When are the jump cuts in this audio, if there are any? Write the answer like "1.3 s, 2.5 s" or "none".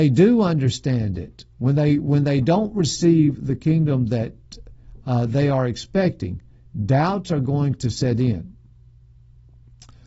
1.5 s